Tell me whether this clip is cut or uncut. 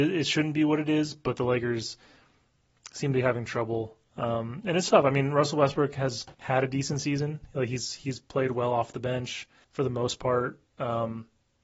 cut